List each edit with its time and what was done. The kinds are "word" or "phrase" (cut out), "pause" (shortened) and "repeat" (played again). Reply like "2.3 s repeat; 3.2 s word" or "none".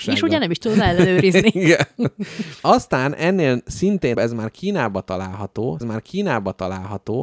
2.6 s pause; 4.1 s word; 5.8 s repeat